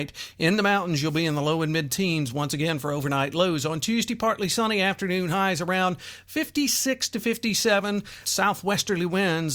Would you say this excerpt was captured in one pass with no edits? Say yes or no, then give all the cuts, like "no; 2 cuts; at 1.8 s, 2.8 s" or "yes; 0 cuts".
no; 1 cut; at 8.2 s